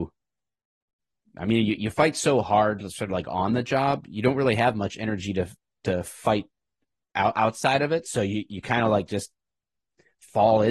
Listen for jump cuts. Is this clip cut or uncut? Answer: uncut